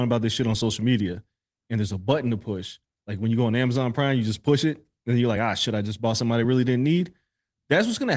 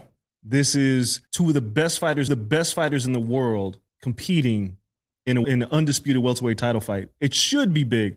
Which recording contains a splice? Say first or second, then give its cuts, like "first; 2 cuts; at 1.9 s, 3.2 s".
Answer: second; 4 cuts; at 1.3 s, 2.3 s, 3.9 s, 5.4 s